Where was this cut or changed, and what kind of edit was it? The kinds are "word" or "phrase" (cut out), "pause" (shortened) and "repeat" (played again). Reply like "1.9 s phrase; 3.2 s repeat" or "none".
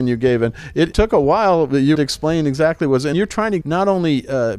0.9 s word; 1.9 s word; 3.1 s word; 3.6 s word